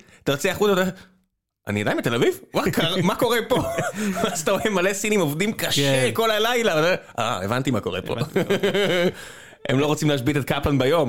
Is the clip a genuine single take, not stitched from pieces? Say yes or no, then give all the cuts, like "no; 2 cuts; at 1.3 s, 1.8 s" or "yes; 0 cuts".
yes; 0 cuts